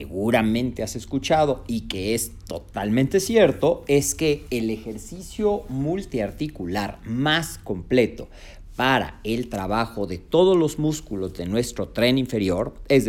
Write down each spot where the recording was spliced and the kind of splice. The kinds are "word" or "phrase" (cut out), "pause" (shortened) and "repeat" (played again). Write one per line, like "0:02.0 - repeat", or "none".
none

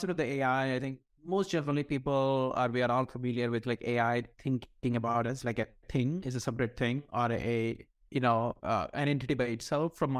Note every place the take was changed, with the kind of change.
0:04.3 - pause
0:08.0 - word
0:08.6 - pause

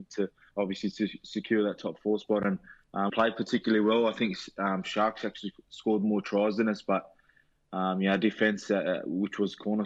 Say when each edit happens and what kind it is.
0:03.1 - phrase

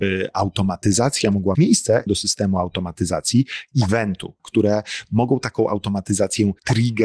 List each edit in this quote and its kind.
0:01.5 - word
0:02.1 - phrase
0:04.4 - word

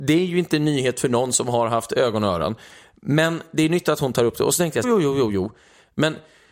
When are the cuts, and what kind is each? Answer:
0:04.8 - phrase

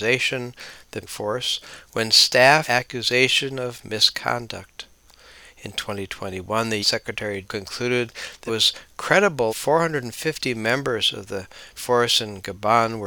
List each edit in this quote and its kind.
0:01.0 - word
0:02.6 - word
0:06.8 - word
0:07.4 - word
0:08.5 - word
0:09.5 - word
0:11.8 - word

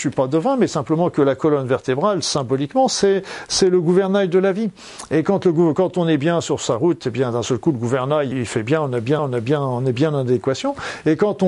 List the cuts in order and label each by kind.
0:08.3 - word
0:09.2 - repeat

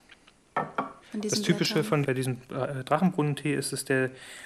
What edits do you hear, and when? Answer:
0:01.0 - pause
0:02.0 - word

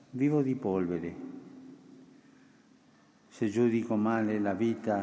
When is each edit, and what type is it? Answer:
none

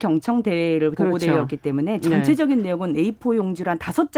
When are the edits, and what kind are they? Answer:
0:01.0 - word

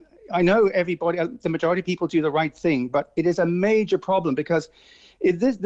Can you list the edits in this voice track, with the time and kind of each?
none

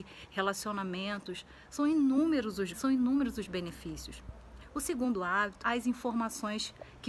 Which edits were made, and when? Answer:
0:02.7 - word
0:05.6 - phrase

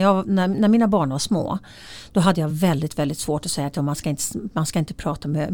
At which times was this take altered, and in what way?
none

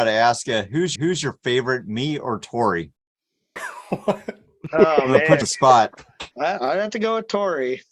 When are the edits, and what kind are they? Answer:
0:01.0 - repeat
0:03.0 - pause
0:05.4 - phrase
0:06.3 - pause

